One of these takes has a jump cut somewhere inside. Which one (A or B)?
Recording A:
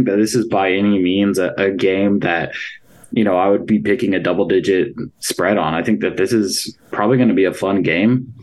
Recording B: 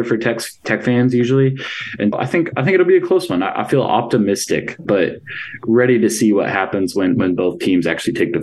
B